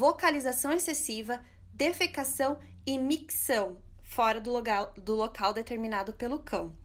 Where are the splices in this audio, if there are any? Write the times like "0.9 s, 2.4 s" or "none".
none